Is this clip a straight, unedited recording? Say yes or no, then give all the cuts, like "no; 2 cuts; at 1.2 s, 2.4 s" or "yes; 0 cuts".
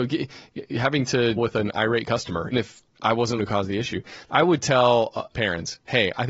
no; 4 cuts; at 1.4 s, 2.5 s, 3.4 s, 5.3 s